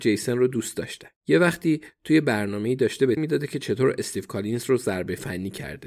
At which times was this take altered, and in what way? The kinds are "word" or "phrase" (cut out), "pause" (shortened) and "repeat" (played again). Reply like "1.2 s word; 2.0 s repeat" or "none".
1.2 s pause; 3.2 s phrase